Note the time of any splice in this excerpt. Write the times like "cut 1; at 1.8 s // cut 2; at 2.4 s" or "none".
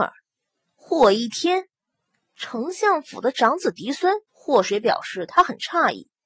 cut 1; at 4.3 s